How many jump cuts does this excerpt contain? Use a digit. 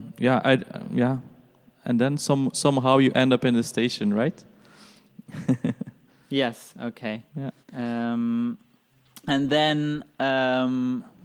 2